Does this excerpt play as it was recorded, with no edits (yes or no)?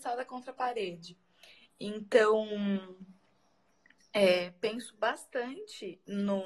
yes